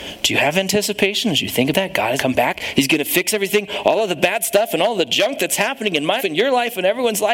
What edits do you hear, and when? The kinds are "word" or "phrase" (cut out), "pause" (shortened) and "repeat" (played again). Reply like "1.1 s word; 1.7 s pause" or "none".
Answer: 1.7 s word; 2.2 s word; 6.2 s word